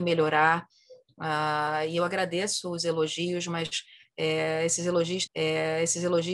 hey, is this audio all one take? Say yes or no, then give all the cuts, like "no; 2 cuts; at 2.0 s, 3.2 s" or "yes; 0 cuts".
no; 1 cut; at 5.3 s